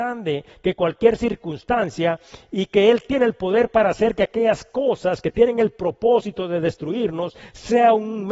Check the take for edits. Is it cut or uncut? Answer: uncut